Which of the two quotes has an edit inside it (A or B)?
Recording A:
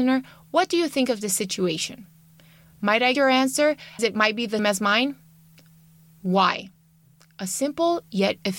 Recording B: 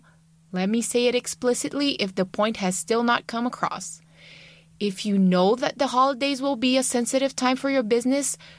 A